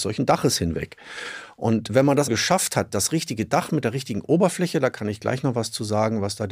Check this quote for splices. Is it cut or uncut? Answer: cut